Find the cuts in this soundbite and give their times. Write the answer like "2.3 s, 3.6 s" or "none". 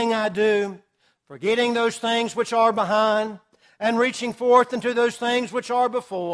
none